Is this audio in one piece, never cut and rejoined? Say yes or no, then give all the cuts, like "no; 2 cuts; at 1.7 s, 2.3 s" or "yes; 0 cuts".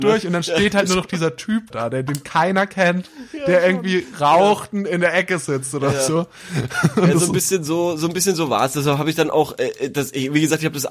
no; 1 cut; at 1.7 s